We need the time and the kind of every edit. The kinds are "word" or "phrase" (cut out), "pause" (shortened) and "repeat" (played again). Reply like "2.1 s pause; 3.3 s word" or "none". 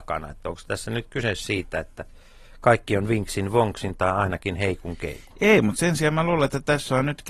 none